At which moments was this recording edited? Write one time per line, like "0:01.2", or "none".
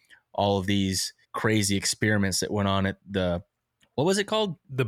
0:01.2
0:03.8